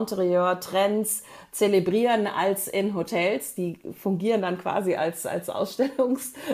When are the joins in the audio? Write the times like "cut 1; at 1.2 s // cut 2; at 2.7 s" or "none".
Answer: none